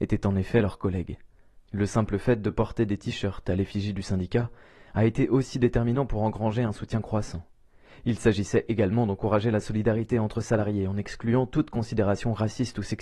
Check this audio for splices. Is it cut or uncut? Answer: uncut